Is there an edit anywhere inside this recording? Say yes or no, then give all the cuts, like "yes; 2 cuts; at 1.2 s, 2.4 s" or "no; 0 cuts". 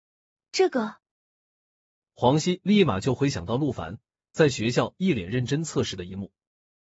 no; 0 cuts